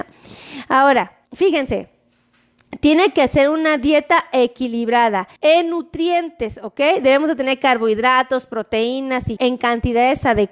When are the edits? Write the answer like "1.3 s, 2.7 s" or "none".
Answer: 1.3 s, 5.4 s, 9.4 s